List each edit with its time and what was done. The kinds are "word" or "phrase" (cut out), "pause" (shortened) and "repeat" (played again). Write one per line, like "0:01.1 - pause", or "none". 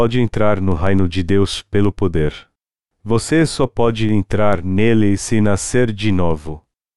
none